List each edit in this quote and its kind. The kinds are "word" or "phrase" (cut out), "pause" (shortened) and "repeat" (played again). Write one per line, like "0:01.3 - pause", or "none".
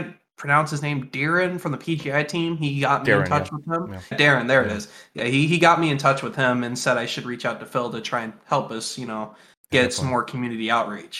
0:04.1 - word